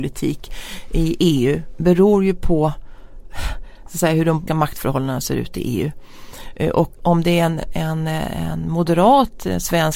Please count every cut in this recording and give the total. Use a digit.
2